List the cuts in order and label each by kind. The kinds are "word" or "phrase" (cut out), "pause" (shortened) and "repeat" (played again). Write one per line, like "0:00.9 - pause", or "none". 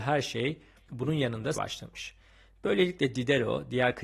0:01.5 - word